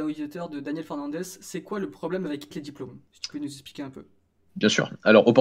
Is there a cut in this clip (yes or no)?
yes